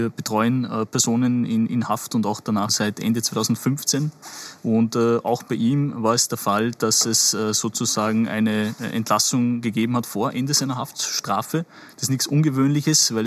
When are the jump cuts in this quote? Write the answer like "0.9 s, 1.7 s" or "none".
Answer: 2.7 s